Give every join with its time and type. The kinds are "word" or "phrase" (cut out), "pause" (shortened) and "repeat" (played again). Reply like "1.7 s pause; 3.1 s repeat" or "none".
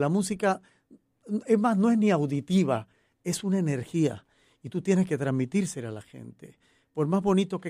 none